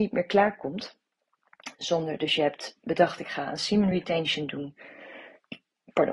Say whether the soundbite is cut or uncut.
uncut